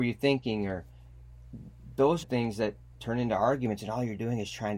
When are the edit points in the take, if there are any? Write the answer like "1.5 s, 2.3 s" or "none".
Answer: 2.2 s